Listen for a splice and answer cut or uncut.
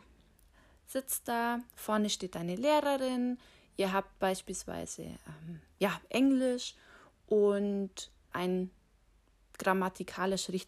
cut